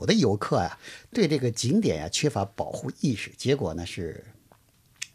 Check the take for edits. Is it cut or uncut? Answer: uncut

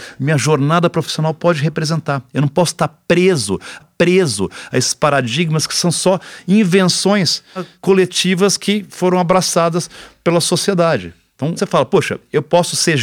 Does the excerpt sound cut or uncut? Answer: cut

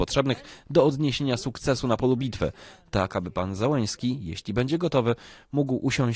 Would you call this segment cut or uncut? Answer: uncut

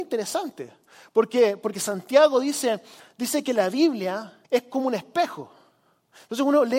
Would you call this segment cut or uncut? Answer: cut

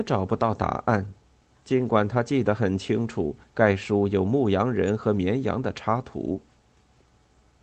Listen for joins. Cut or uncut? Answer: uncut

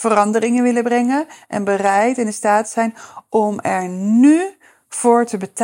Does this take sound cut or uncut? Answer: uncut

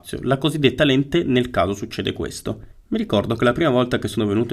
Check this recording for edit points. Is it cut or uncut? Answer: uncut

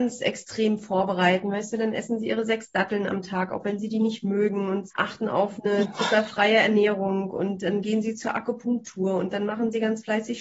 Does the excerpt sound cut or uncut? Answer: cut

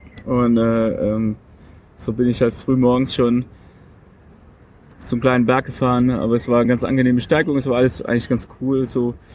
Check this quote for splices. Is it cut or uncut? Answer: uncut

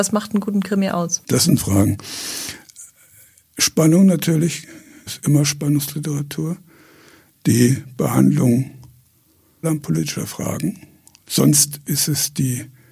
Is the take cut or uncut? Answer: cut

